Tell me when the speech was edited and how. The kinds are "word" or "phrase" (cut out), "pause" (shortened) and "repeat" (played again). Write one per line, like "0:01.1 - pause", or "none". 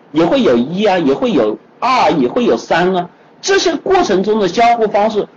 none